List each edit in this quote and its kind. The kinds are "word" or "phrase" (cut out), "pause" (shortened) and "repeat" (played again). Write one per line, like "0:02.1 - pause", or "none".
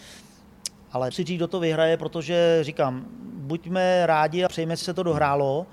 0:01.1 - word
0:04.5 - word
0:04.8 - word